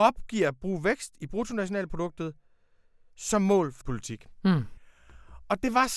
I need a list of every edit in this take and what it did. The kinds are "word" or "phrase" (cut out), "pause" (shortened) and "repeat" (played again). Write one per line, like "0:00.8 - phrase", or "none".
0:03.8 - word